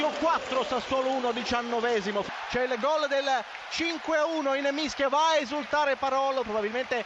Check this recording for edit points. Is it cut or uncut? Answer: uncut